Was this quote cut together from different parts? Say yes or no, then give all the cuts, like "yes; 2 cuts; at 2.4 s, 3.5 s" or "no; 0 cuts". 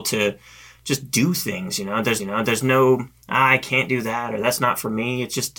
yes; 1 cut; at 2.2 s